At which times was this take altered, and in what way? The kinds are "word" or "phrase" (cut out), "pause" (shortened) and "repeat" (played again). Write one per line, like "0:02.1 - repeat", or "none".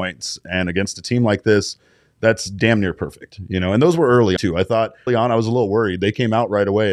0:04.4 - word
0:05.1 - word

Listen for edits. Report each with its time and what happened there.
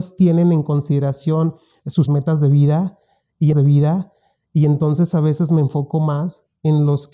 0:02.1 - phrase
0:03.5 - repeat

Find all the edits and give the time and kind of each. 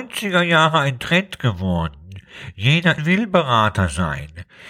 0:03.0 - phrase

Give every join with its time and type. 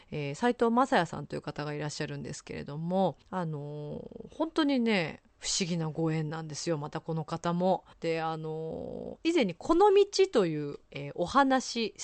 0:03.2 - pause
0:05.3 - pause
0:07.9 - pause
0:10.8 - pause

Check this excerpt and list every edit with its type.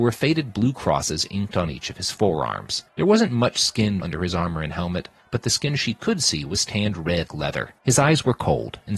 0:02.9 - pause
0:04.0 - word
0:07.3 - word
0:07.8 - pause

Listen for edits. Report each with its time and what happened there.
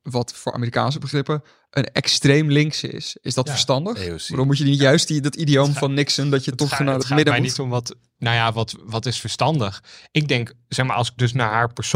none

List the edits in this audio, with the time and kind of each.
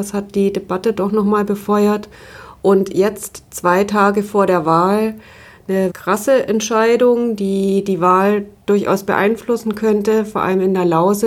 0:05.9 - word

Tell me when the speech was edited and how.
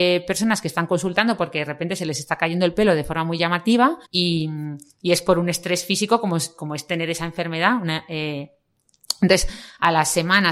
0:04.0 - pause

